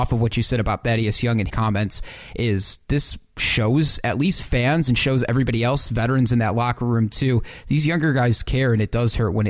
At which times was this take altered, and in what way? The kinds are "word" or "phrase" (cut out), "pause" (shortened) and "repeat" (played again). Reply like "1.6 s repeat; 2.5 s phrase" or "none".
1.5 s word